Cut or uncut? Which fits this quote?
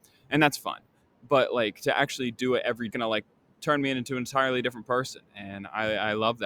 cut